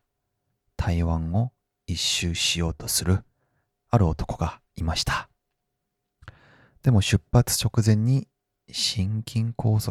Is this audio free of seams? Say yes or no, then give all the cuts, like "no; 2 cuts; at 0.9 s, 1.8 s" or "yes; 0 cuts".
no; 1 cut; at 4.7 s